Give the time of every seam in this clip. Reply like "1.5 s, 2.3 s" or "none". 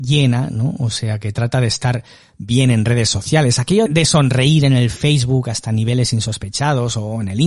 3.9 s